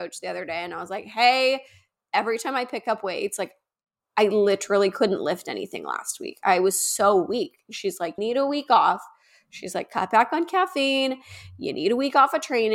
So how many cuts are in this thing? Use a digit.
1